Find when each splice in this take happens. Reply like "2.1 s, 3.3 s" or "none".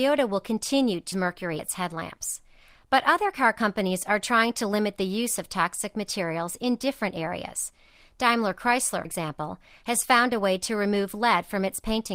1.1 s, 1.6 s, 9.0 s